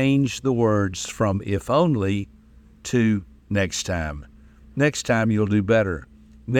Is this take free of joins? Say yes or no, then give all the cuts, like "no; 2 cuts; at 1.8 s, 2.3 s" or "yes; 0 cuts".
yes; 0 cuts